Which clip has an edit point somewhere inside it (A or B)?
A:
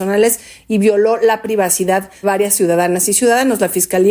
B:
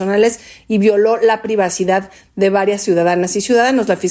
A